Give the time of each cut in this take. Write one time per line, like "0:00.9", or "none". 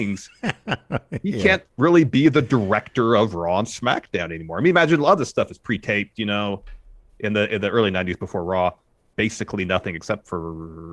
none